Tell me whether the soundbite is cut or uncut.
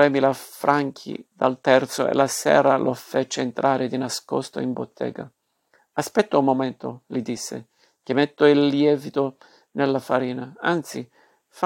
uncut